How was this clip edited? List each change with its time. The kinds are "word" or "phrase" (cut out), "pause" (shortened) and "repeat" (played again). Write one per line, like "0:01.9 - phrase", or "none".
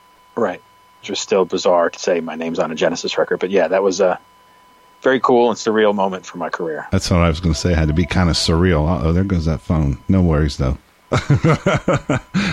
0:01.0 - word
0:01.9 - word